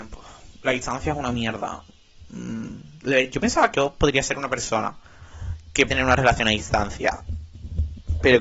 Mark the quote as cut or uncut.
cut